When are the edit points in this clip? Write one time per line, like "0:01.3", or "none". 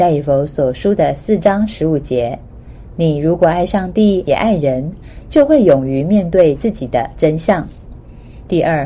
0:04.3